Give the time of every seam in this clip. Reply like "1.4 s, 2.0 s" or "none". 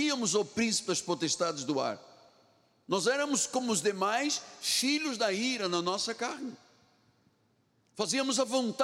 none